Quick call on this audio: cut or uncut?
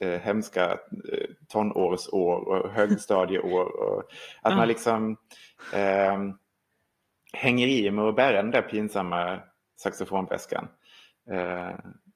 uncut